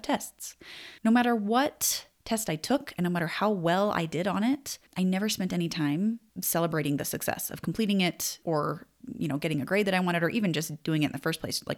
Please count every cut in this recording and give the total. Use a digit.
4